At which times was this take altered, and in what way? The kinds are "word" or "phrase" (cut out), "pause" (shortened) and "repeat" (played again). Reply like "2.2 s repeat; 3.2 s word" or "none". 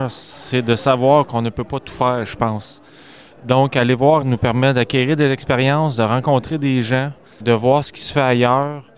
4.2 s word; 7.4 s word